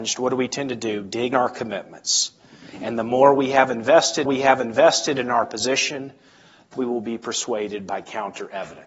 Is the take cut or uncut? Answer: cut